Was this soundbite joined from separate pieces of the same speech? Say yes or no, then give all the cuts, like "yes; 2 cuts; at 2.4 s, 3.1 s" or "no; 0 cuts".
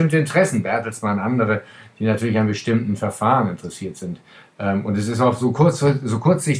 no; 0 cuts